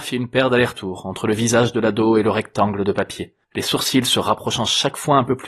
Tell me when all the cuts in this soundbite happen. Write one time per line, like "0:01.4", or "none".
0:03.4